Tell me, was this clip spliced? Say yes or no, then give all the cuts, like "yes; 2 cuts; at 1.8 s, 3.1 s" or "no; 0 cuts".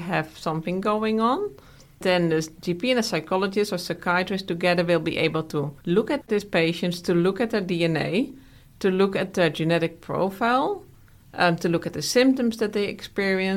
no; 0 cuts